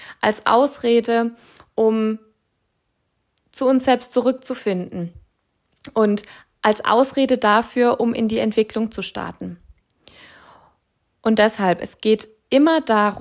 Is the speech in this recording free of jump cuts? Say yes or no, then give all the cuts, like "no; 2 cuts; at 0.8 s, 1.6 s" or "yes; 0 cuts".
yes; 0 cuts